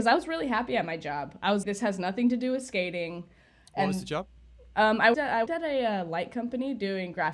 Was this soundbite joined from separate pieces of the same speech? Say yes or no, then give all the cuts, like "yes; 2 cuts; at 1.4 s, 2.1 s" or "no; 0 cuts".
yes; 3 cuts; at 1.6 s, 5.1 s, 5.5 s